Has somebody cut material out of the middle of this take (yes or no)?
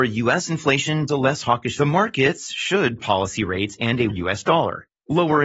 yes